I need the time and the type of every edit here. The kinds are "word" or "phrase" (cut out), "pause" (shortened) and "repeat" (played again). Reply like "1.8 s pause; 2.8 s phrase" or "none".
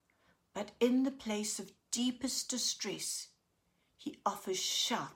none